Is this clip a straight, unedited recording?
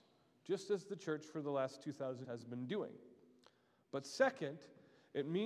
no; 1 cut; at 2.2 s

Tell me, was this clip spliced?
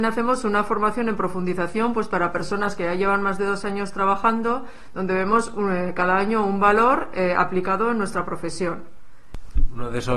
no; 0 cuts

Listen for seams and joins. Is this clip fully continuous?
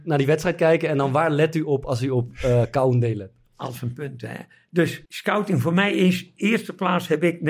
no; 1 cut; at 5.1 s

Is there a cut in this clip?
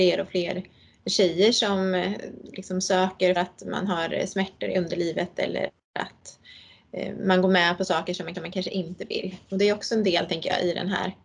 yes; 2 cuts; at 3.4 s, 8.3 s

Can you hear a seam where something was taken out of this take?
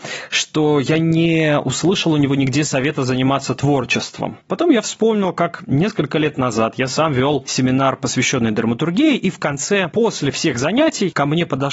yes; 1 cut; at 4.4 s

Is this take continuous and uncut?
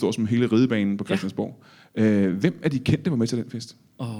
yes; 0 cuts

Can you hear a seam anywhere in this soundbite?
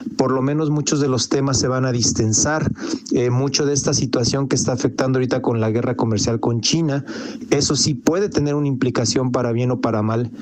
no; 0 cuts

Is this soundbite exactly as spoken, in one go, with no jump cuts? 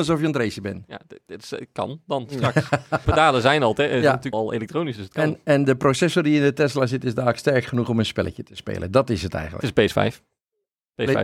no; 2 cuts; at 3.0 s, 4.3 s

